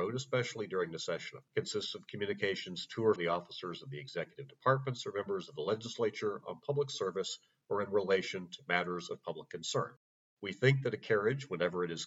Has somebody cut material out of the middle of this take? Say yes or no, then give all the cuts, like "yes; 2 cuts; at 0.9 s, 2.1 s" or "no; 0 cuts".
yes; 2 cuts; at 1.5 s, 3.2 s